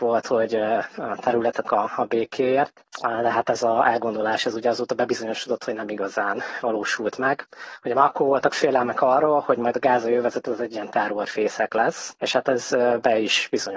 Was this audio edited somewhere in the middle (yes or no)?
yes